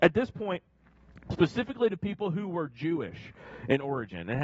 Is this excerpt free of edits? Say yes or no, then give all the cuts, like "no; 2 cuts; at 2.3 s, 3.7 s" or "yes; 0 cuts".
yes; 0 cuts